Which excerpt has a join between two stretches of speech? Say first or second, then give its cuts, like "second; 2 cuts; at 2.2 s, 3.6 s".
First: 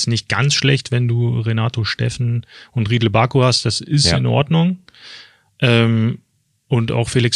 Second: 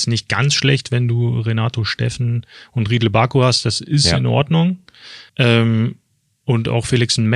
second; 1 cut; at 5.3 s